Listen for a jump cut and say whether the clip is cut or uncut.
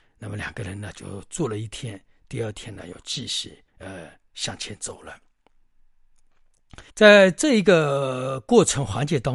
cut